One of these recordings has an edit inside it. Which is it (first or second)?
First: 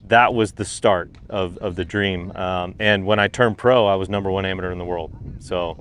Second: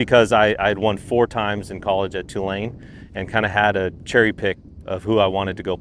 second